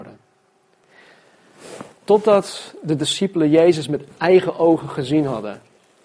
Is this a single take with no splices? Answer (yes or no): no